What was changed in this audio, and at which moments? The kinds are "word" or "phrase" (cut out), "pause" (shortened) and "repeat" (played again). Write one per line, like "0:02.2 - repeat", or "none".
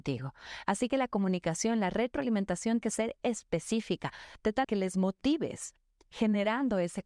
0:02.8 - word
0:04.6 - word